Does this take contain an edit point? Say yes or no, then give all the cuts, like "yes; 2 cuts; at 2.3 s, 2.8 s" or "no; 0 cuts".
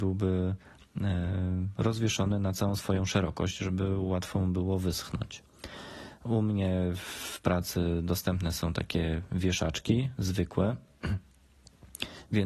no; 0 cuts